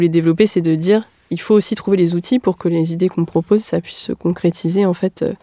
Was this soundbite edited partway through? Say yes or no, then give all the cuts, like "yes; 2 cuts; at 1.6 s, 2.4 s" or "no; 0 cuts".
no; 0 cuts